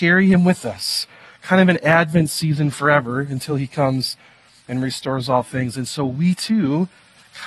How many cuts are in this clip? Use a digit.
0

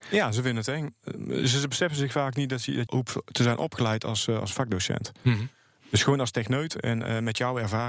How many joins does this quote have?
1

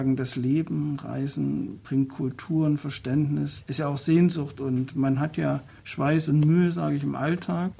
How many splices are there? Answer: 1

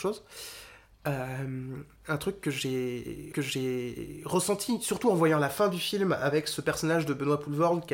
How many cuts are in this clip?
1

